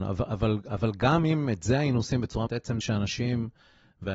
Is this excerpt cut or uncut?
cut